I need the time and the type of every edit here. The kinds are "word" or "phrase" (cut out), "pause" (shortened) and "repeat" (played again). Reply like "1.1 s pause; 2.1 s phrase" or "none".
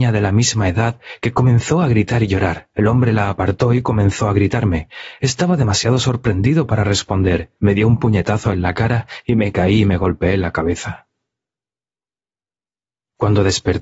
2.7 s pause; 7.6 s pause